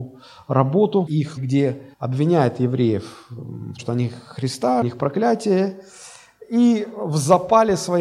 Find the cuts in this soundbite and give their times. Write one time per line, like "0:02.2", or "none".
0:01.1
0:01.4
0:01.9
0:03.8
0:04.8